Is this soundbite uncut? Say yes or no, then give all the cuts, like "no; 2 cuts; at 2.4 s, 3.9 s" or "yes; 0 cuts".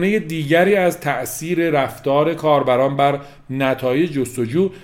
yes; 0 cuts